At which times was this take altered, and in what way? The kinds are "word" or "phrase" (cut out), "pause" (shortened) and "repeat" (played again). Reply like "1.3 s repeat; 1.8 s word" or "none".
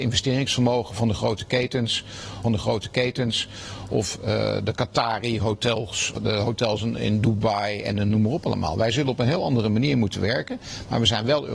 2.4 s repeat; 6.1 s word